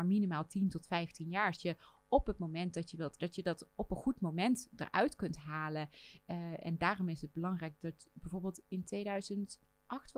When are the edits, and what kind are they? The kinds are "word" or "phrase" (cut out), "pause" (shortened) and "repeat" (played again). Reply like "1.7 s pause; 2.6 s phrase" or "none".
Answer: 1.6 s word; 3.2 s word